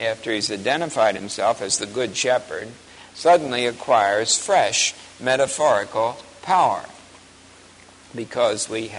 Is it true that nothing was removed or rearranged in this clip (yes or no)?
yes